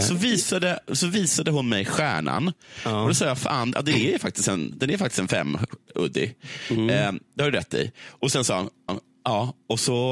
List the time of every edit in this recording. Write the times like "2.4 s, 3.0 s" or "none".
5.9 s, 8.9 s